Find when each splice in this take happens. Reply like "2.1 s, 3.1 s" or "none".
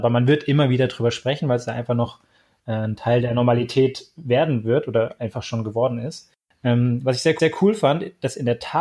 7.4 s